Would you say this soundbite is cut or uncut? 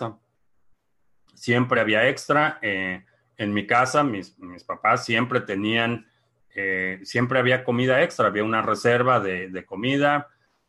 uncut